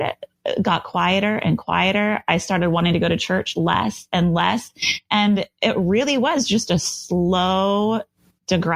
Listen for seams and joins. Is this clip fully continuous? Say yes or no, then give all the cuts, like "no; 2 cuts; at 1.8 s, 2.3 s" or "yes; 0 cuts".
yes; 0 cuts